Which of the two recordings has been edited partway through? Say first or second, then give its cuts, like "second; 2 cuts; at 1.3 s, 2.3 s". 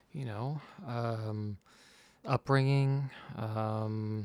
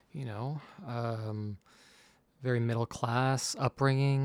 first; 1 cut; at 2.2 s